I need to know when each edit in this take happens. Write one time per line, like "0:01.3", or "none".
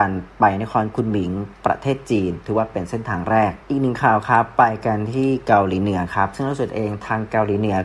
0:03.6